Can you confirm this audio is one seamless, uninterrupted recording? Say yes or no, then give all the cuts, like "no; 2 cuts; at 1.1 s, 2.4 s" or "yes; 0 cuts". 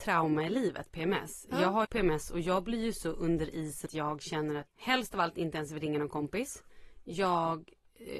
no; 3 cuts; at 1.8 s, 3.9 s, 4.7 s